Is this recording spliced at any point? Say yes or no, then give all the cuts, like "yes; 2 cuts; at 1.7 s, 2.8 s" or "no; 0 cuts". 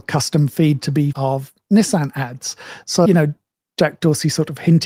yes; 2 cuts; at 1.1 s, 3.1 s